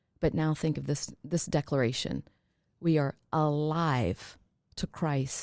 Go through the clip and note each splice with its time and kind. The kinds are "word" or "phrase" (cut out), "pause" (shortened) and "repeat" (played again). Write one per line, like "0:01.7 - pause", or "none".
none